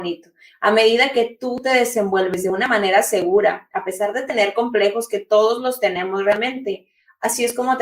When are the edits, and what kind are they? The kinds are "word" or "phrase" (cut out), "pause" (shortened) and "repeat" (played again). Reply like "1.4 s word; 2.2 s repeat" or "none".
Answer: none